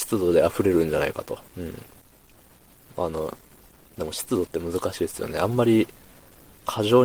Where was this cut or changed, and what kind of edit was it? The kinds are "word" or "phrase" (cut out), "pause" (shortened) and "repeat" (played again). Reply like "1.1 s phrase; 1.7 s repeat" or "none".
1.5 s pause